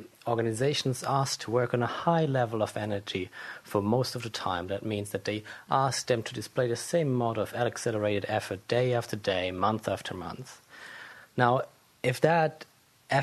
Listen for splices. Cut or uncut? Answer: cut